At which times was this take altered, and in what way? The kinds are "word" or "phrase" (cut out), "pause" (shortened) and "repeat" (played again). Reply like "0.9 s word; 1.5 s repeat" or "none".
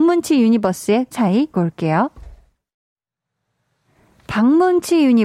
1.1 s word; 1.5 s word